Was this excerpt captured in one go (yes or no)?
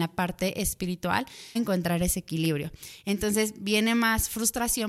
no